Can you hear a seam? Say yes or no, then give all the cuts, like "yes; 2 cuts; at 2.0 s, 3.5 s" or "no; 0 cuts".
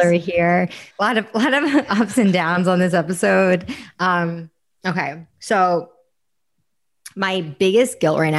yes; 2 cuts; at 0.9 s, 5.3 s